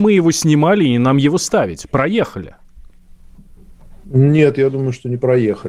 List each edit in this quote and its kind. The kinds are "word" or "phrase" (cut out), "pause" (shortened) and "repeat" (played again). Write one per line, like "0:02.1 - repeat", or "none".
none